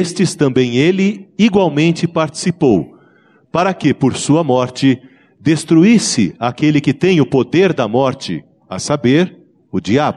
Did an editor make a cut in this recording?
no; 0 cuts

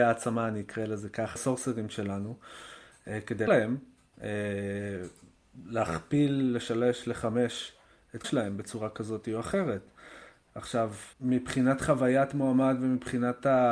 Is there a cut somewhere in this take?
yes; 4 cuts; at 1.4 s, 3.5 s, 8.2 s, 11.1 s

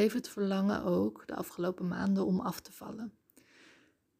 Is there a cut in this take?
no; 0 cuts

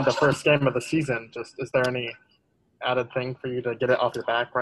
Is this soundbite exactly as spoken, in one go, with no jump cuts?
yes; 0 cuts

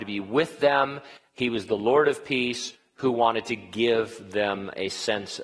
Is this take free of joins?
yes; 0 cuts

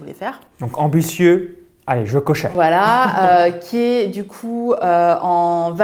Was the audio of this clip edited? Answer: no; 0 cuts

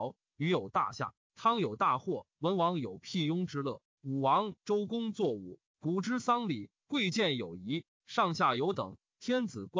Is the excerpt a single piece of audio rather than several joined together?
no; 2 cuts; at 2.3 s, 5.7 s

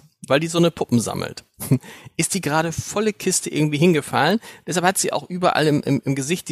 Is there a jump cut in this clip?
no; 0 cuts

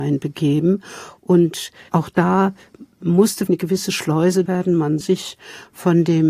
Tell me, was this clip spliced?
yes; 4 cuts; at 1.9 s, 3.5 s, 4.5 s, 5.0 s

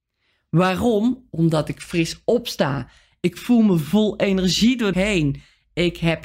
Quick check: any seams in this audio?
yes; 1 cut; at 4.9 s

